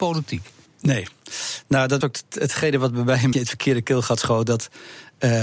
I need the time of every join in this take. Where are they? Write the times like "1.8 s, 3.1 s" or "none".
2.0 s, 3.3 s